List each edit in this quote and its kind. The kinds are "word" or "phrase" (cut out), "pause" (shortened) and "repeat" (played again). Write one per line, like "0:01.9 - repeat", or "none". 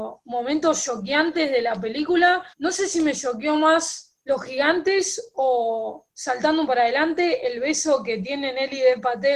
0:02.5 - pause
0:04.2 - pause
0:06.7 - word